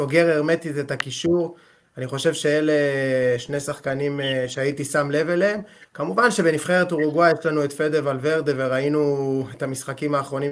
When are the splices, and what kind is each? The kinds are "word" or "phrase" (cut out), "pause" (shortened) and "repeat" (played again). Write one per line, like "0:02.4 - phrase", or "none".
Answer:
none